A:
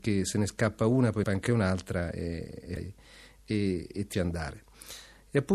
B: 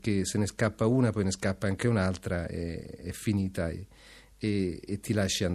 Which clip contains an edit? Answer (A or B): A